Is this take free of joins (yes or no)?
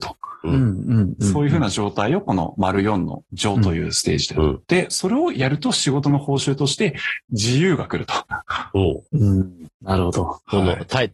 yes